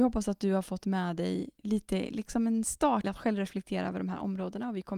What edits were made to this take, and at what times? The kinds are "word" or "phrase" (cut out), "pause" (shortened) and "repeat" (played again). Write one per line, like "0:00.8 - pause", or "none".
0:01.6 - word
0:03.0 - word